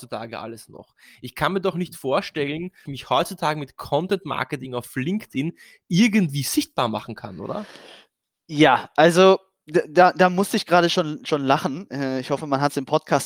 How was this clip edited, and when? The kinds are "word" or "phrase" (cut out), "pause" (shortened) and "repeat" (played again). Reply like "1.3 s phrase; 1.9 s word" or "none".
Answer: 2.8 s phrase